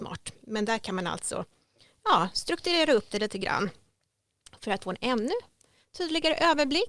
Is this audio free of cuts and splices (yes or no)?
yes